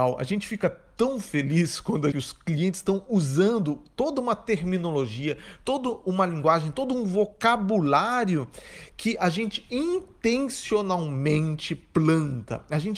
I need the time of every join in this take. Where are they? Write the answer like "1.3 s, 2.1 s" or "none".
2.1 s

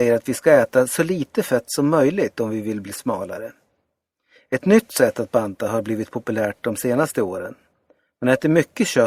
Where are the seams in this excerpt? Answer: none

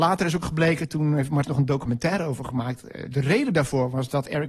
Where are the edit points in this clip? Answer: 1.4 s

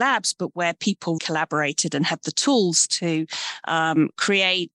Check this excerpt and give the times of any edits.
1.2 s

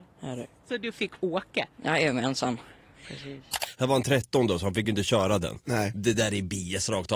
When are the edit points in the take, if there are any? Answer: none

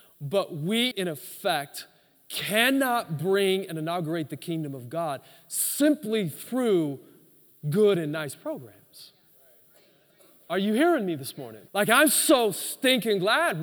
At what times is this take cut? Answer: 0.9 s, 11.7 s

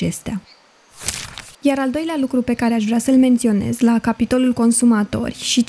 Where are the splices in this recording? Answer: 1.5 s

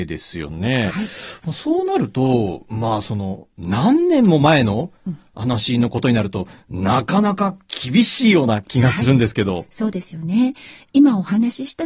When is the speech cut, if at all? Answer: none

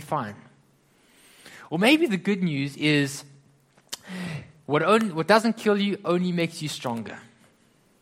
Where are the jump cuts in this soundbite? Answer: none

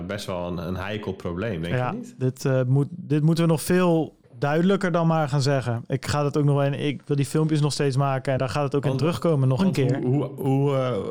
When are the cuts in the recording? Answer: 8.4 s, 9.6 s

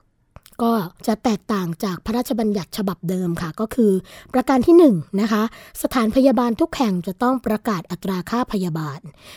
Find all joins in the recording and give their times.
1.0 s

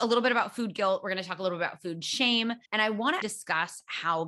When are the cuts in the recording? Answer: 2.7 s, 3.2 s

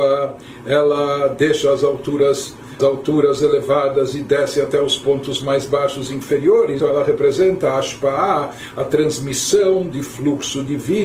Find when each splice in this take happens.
2.8 s, 6.8 s

